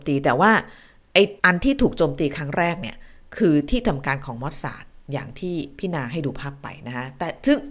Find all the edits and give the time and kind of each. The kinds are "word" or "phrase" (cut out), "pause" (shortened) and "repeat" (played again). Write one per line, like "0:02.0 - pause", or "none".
0:01.4 - pause